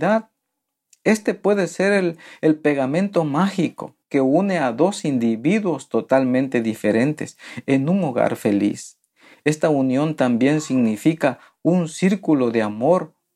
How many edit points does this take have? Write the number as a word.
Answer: zero